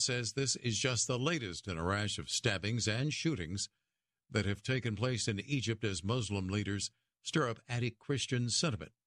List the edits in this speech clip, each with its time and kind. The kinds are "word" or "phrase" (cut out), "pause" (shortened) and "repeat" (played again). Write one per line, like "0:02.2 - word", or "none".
none